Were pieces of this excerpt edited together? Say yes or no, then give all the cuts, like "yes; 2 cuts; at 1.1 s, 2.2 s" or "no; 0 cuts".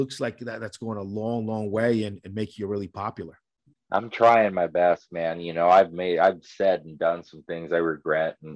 yes; 1 cut; at 3.7 s